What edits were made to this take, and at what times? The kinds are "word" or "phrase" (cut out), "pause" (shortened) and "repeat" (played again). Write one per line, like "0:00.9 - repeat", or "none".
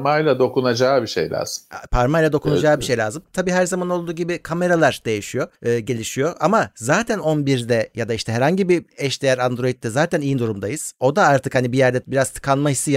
0:05.5 - pause